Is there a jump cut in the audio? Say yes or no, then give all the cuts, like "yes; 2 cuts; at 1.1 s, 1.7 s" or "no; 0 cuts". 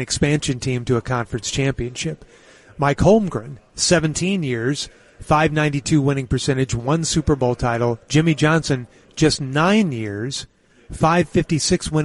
no; 0 cuts